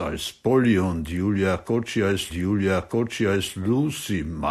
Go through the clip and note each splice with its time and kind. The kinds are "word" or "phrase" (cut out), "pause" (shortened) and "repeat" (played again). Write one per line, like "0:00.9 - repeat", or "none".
0:02.3 - repeat